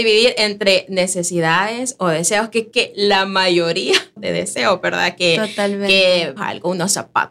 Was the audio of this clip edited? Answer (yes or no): yes